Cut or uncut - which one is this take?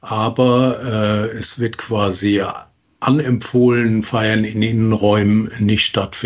uncut